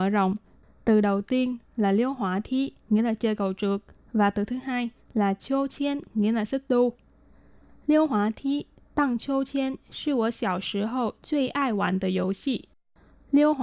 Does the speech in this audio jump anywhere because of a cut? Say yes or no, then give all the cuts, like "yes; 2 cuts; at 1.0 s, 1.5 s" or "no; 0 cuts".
no; 0 cuts